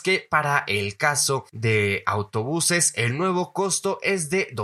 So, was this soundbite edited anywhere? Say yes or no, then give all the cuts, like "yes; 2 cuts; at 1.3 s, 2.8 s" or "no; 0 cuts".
no; 0 cuts